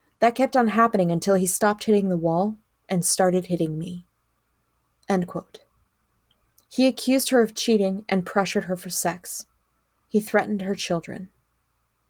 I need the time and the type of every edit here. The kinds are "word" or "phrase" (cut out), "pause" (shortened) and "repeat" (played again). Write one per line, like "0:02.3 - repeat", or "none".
none